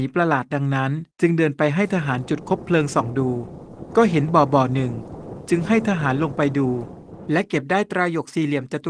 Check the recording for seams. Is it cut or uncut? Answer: cut